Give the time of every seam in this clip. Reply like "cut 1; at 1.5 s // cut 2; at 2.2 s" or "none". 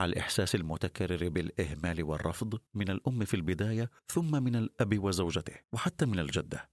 cut 1; at 2.7 s // cut 2; at 4.0 s // cut 3; at 5.6 s

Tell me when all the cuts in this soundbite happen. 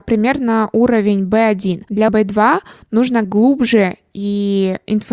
cut 1; at 2.1 s // cut 2; at 3.2 s

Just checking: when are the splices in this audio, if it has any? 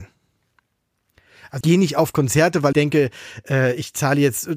cut 1; at 1.6 s // cut 2; at 2.7 s

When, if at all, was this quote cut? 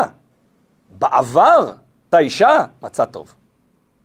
cut 1; at 2.1 s

